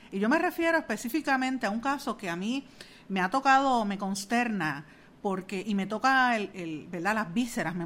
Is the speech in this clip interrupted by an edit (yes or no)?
yes